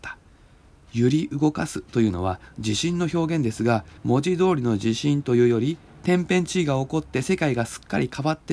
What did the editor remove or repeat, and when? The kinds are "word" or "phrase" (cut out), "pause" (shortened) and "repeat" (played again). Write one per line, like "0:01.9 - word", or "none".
0:04.0 - pause